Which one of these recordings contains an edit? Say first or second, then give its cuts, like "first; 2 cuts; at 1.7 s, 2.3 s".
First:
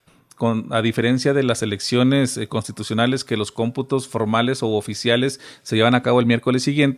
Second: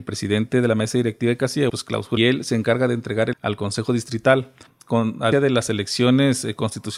second; 5 cuts; at 1.7 s, 2.2 s, 3.3 s, 4.7 s, 5.3 s